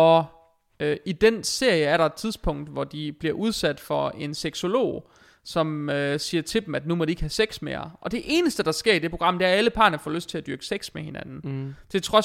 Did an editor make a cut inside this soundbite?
no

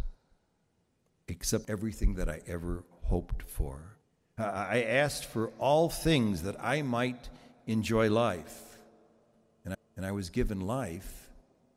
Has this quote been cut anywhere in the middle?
yes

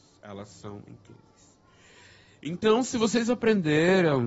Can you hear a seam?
no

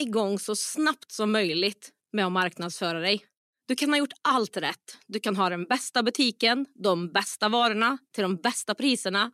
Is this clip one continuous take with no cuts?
no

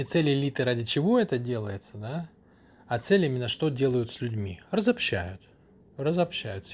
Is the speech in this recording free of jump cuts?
yes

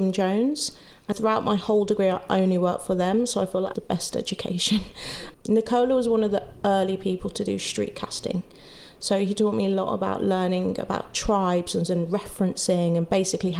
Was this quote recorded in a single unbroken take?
no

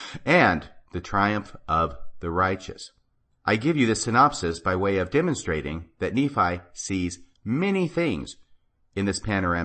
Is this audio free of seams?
yes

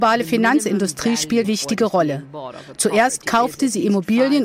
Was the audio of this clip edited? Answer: yes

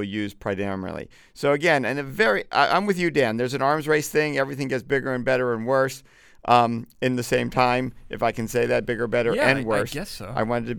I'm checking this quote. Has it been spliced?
no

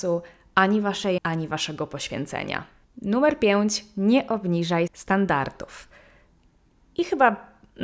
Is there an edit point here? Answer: yes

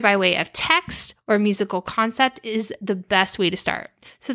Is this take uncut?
yes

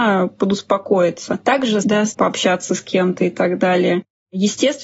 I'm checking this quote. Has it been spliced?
yes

